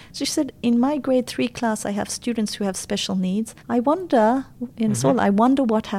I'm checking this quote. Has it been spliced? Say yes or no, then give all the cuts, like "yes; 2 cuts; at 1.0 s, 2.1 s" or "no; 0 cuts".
yes; 1 cut; at 3.6 s